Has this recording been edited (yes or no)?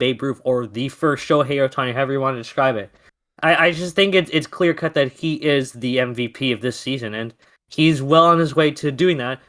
no